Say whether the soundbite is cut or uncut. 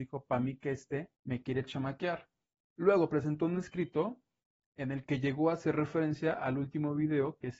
cut